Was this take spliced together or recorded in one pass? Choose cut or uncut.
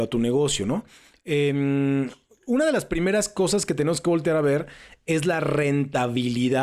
uncut